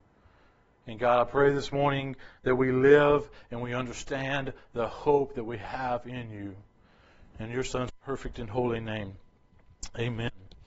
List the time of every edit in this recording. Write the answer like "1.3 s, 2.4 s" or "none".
none